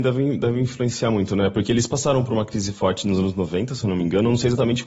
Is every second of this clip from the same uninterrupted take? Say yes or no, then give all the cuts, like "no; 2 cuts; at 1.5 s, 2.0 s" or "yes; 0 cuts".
yes; 0 cuts